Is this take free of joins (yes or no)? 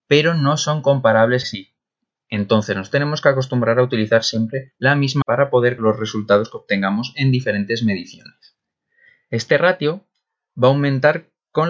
no